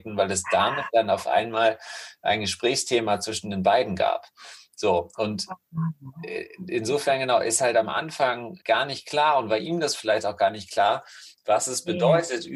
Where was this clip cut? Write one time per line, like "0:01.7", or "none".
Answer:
0:08.6